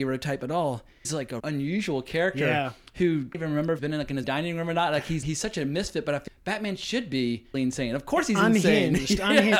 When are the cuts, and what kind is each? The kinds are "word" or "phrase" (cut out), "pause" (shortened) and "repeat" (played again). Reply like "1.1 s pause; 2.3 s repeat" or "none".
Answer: 1.0 s word; 1.4 s word; 3.3 s word; 3.8 s word; 4.2 s word; 5.2 s word; 6.3 s word; 7.5 s word

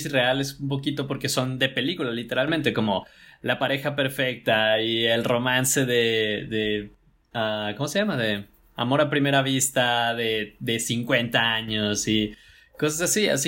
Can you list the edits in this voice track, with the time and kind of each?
none

